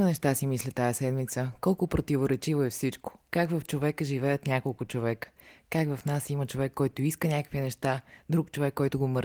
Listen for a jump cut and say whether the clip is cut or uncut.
uncut